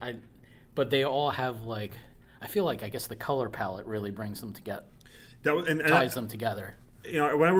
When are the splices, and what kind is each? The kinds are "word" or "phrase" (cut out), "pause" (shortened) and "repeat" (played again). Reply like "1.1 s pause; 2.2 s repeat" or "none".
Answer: none